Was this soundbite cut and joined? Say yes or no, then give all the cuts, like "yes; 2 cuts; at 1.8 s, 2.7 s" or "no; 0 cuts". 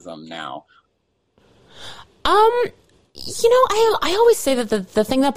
no; 0 cuts